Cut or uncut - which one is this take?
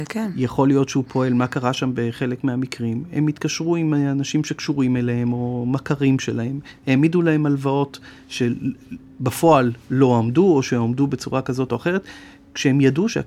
uncut